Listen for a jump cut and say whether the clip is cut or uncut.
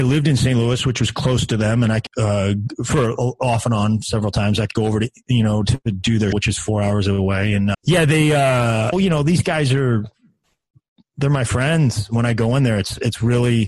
cut